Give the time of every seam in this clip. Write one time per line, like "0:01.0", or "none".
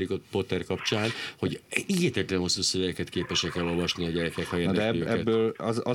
none